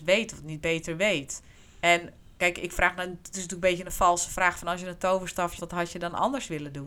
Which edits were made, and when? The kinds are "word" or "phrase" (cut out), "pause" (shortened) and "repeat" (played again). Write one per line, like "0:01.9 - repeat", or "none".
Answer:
0:01.5 - pause
0:05.6 - word